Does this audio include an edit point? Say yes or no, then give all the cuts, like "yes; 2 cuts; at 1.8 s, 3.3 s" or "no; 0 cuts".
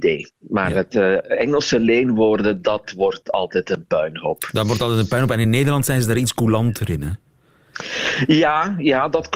no; 0 cuts